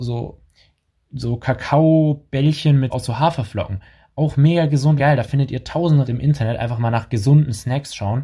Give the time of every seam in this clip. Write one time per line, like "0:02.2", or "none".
0:02.9
0:05.0
0:06.0